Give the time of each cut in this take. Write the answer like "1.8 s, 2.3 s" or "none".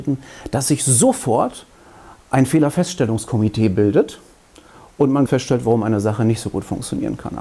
5.3 s